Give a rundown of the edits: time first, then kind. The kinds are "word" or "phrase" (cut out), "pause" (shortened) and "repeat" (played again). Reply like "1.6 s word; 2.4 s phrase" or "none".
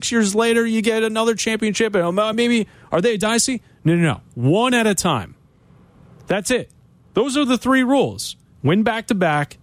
none